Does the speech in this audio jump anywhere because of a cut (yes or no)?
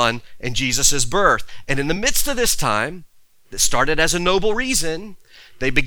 no